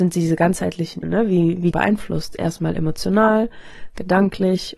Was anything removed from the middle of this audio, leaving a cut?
yes; 2 cuts; at 1.0 s, 1.7 s

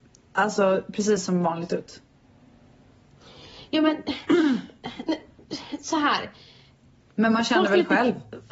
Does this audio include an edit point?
no; 0 cuts

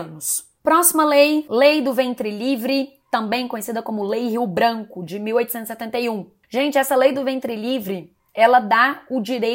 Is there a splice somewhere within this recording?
no; 0 cuts

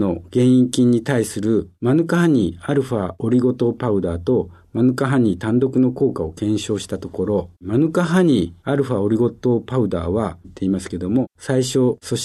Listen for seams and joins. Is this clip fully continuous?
no; 2 cuts; at 7.5 s, 10.4 s

